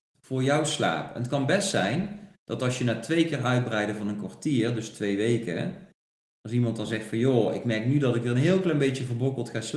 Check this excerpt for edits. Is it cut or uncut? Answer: uncut